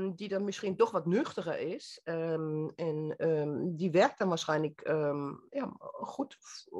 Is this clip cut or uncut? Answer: uncut